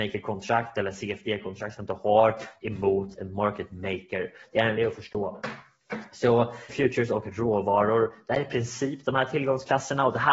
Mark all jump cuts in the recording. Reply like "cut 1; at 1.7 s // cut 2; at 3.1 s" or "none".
cut 1; at 4.8 s // cut 2; at 6.7 s